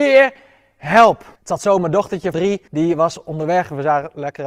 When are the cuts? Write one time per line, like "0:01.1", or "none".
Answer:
0:01.4
0:02.3
0:02.7